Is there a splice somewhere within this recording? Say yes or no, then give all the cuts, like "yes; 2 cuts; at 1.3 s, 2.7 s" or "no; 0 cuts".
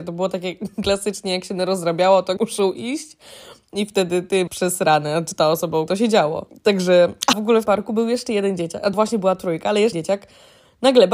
yes; 7 cuts; at 2.4 s, 4.5 s, 5.9 s, 7.3 s, 7.7 s, 8.9 s, 9.9 s